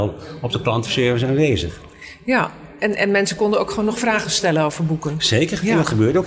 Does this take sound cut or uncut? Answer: uncut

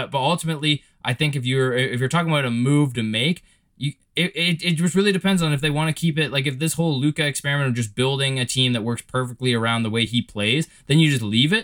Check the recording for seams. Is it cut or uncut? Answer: uncut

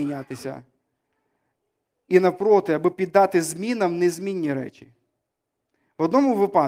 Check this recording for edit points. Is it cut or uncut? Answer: uncut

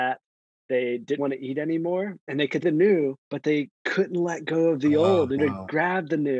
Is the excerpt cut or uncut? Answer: cut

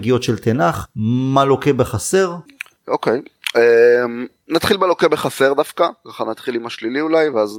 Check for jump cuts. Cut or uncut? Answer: uncut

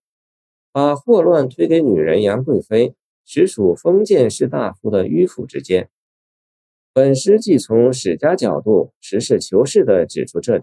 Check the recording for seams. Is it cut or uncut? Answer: uncut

